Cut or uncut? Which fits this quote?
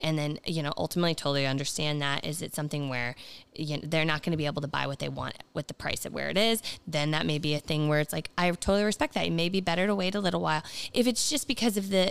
uncut